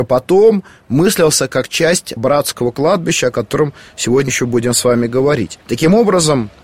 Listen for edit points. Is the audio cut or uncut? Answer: cut